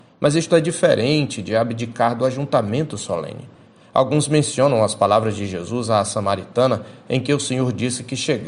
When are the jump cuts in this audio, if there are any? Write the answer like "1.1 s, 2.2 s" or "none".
none